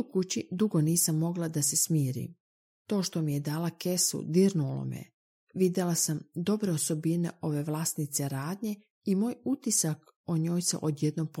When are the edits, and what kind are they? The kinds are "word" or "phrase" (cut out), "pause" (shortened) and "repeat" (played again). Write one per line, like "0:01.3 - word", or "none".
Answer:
none

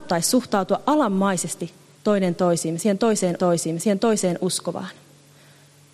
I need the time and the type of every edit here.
0:01.9 - pause
0:03.4 - repeat

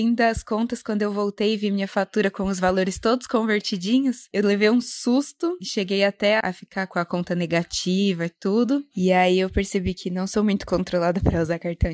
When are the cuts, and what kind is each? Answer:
0:06.4 - word

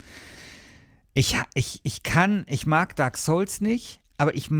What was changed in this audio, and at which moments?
none

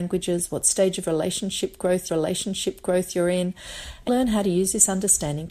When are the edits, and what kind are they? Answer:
0:02.1 - repeat
0:04.1 - word

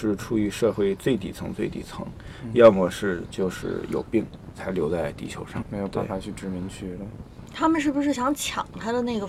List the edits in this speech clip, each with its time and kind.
0:05.6 - word

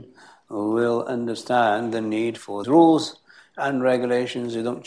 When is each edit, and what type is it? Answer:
0:02.6 - word

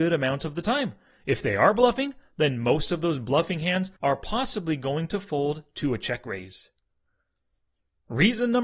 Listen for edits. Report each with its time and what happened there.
0:04.0 - pause

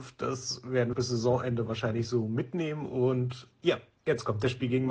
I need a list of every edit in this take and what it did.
0:00.9 - phrase

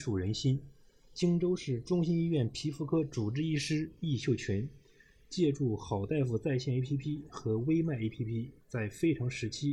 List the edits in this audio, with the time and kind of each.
none

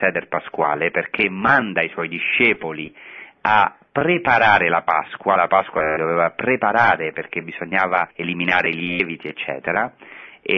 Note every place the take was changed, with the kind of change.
0:08.1 - pause

